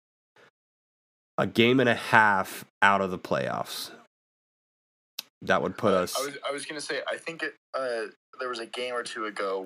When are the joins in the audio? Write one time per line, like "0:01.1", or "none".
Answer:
0:02.7